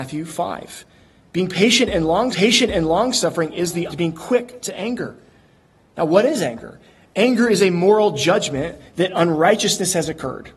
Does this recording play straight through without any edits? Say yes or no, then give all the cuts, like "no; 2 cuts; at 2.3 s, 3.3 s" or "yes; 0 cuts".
no; 2 cuts; at 2.3 s, 3.9 s